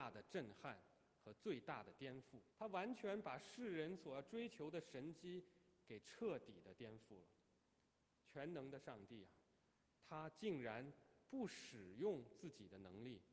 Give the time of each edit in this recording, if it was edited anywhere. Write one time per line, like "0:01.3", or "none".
0:02.5